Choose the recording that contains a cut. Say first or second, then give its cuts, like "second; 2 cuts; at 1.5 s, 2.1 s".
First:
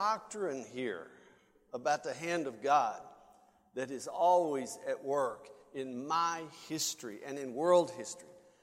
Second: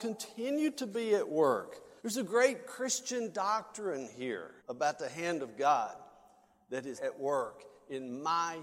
second; 3 cuts; at 2.0 s, 4.6 s, 7.0 s